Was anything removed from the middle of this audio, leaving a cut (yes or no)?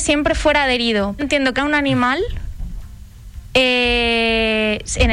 yes